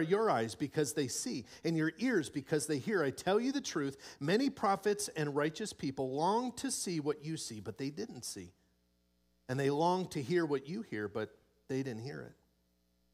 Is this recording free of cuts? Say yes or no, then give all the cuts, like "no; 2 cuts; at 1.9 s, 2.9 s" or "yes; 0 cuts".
yes; 0 cuts